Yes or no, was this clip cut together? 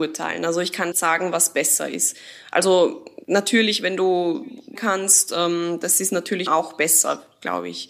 yes